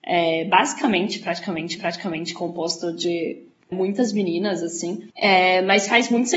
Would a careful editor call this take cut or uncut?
cut